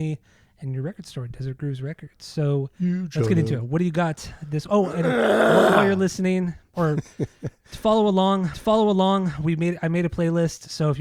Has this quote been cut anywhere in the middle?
yes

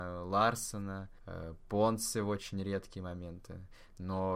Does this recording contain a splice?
no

